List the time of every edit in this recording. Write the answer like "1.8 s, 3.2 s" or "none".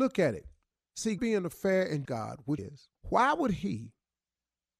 1.2 s, 2.1 s, 2.6 s, 3.0 s